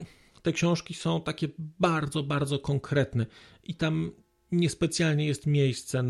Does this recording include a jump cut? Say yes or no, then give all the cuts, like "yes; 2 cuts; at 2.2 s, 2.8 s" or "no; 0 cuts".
no; 0 cuts